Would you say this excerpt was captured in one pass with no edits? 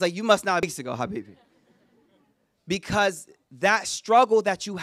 yes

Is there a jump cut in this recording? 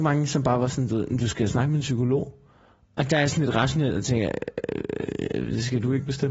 no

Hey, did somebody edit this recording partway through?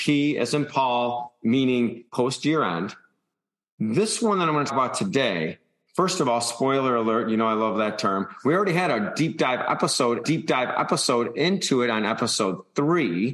yes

